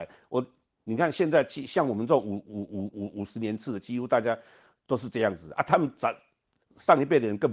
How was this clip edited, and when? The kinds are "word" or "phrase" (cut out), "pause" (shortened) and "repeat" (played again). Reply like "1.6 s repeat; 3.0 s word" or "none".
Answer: none